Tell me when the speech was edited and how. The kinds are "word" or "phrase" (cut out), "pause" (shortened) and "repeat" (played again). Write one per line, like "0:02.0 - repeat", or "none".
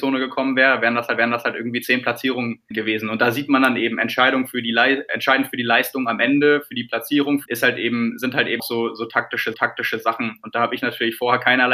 0:01.2 - repeat
0:02.7 - word
0:07.5 - phrase
0:08.6 - word
0:09.5 - repeat